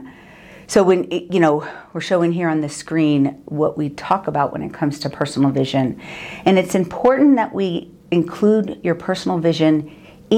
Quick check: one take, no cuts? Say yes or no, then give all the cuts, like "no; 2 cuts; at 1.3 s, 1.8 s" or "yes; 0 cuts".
yes; 0 cuts